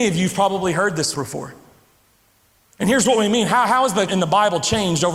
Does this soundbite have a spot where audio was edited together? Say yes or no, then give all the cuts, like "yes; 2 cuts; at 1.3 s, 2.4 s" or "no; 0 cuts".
yes; 2 cuts; at 1.1 s, 4.1 s